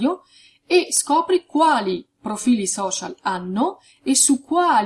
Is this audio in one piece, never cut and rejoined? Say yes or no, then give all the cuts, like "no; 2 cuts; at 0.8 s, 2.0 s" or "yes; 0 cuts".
yes; 0 cuts